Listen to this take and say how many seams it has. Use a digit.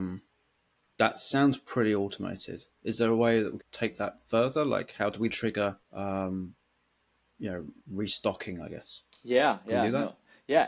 4